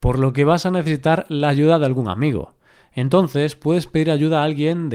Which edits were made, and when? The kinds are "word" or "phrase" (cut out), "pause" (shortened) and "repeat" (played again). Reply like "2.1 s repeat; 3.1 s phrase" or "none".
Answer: none